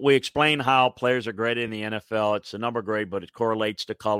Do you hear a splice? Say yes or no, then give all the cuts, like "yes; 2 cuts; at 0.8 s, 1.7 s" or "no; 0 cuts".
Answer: no; 0 cuts